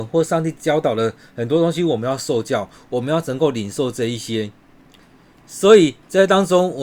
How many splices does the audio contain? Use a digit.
0